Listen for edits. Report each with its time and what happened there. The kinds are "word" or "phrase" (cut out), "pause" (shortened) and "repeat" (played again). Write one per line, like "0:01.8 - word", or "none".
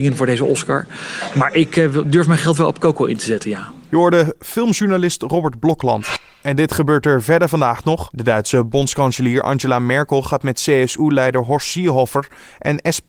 none